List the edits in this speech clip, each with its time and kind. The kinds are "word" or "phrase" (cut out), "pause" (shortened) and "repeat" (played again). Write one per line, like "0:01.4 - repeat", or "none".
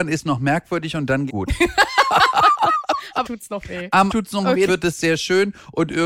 0:01.3 - word
0:03.2 - word
0:04.1 - word
0:04.7 - word